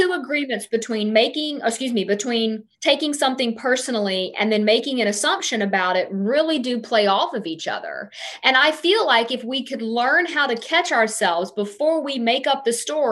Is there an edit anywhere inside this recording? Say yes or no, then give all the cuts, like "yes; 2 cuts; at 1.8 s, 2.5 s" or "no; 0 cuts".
yes; 1 cut; at 2.7 s